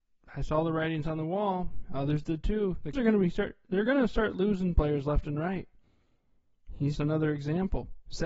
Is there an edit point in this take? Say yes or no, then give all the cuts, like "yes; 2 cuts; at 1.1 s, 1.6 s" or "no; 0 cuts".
yes; 2 cuts; at 2.9 s, 7.0 s